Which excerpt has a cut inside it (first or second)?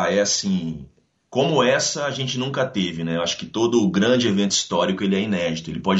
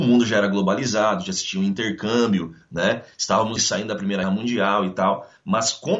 second